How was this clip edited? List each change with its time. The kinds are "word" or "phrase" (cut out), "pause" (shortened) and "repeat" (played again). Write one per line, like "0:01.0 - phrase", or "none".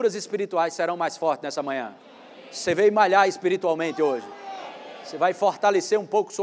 none